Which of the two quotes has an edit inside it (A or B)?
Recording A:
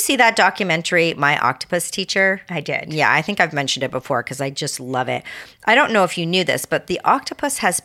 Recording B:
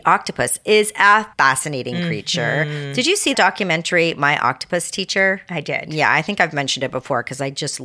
B